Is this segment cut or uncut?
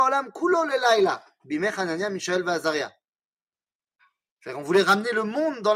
uncut